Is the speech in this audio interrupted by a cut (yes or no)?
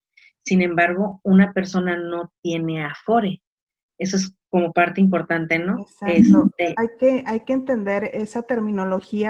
no